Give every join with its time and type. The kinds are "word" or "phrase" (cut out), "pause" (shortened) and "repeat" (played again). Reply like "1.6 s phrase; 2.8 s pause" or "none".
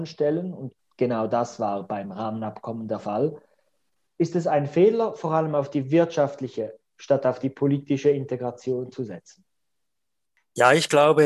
none